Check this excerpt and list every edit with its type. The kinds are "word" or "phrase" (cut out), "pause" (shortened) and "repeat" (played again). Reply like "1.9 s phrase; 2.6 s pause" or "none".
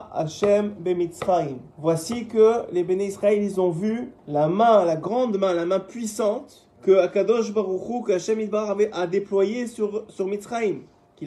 1.7 s pause; 4.2 s pause; 6.7 s pause

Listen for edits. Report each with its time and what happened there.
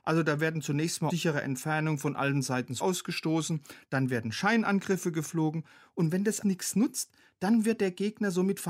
1.1 s word; 2.8 s word; 6.4 s word

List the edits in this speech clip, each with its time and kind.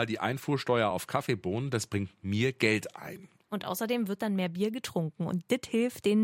none

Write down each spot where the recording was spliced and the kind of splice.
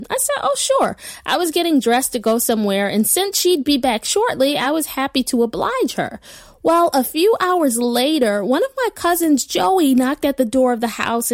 none

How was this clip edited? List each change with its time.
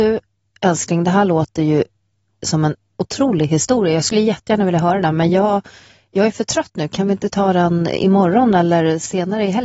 none

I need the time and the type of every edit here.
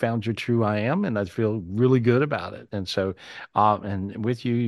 none

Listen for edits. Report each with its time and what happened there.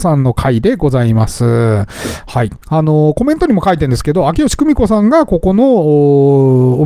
2.6 s pause

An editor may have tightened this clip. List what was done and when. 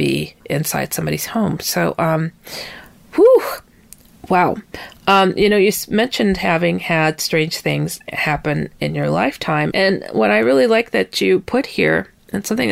9.7 s word

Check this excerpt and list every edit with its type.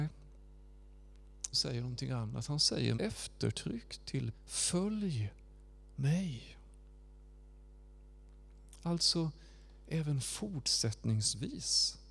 1.5 s word; 2.9 s word; 4.3 s word

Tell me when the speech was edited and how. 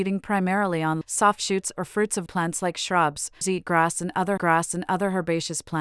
1.0 s word; 2.3 s word; 3.4 s phrase; 4.4 s repeat

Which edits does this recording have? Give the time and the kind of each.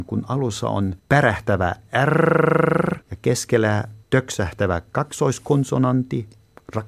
1.0 s pause; 3.0 s pause; 4.0 s pause

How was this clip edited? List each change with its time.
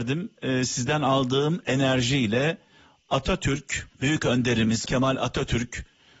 3.9 s pause; 4.9 s word

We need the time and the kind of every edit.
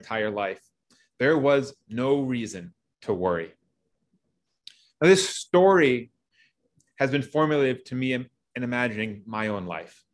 none

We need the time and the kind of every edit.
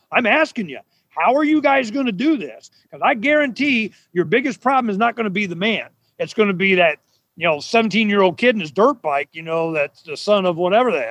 none

